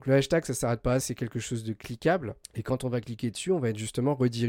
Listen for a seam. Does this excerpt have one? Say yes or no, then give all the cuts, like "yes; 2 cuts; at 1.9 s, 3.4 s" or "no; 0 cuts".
yes; 2 cuts; at 1.0 s, 2.4 s